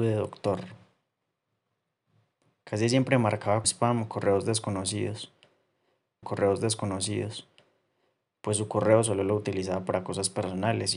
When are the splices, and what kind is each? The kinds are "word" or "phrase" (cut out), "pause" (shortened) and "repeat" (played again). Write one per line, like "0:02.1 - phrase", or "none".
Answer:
0:03.6 - word
0:06.2 - repeat